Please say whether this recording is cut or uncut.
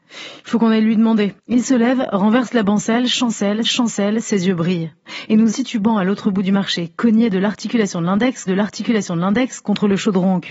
cut